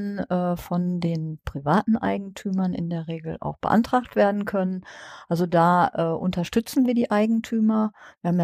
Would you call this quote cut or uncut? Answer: uncut